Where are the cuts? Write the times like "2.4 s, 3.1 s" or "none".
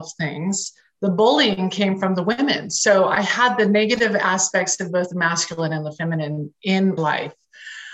7.0 s